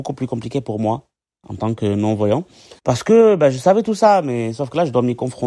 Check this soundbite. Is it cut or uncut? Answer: cut